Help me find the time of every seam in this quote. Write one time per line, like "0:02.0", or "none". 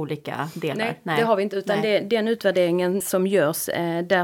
0:03.0